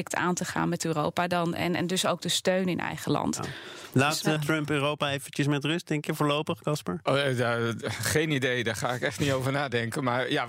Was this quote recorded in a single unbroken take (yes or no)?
no